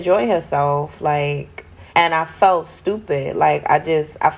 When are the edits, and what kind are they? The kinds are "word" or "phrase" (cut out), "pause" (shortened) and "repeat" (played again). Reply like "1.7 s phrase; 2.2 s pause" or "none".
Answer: 1.9 s pause